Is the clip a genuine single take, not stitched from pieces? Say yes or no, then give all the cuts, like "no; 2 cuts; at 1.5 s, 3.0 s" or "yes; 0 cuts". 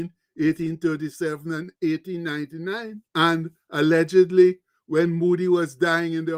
no; 1 cut; at 3.1 s